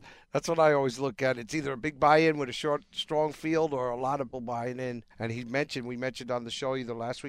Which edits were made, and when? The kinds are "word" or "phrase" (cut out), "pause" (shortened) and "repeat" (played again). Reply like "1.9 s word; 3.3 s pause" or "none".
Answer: 4.3 s word; 5.1 s pause